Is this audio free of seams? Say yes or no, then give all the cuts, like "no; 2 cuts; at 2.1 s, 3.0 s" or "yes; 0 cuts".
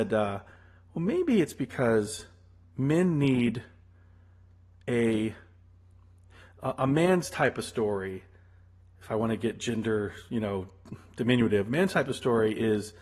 yes; 0 cuts